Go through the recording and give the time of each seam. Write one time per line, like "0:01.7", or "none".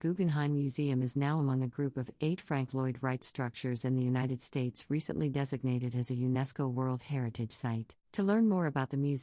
0:08.0